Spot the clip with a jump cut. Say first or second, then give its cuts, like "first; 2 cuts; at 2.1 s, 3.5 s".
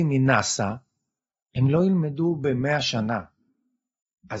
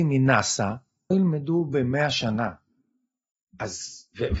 second; 1 cut; at 1.1 s